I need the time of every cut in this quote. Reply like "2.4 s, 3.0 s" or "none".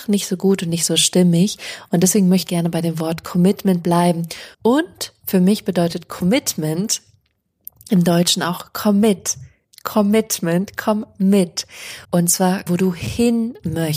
2.5 s, 4.5 s, 12.0 s, 12.7 s